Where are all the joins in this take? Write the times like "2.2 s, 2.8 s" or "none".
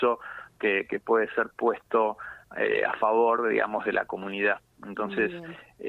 none